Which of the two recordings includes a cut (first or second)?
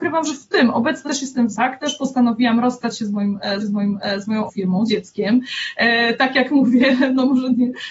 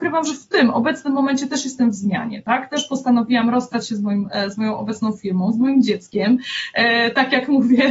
first